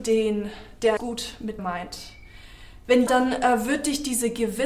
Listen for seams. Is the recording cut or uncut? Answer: cut